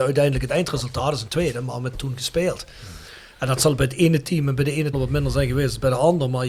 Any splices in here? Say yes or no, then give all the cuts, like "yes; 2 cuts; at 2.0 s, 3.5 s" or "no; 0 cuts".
yes; 2 cuts; at 1.9 s, 4.9 s